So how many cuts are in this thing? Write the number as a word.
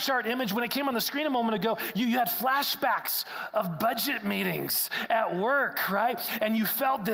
zero